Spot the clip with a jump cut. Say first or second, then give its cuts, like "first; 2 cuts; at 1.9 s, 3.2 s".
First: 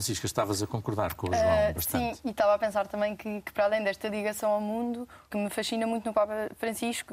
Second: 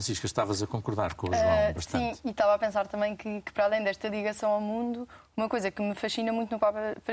first; 1 cut; at 5.3 s